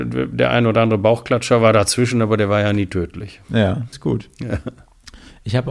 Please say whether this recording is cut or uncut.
cut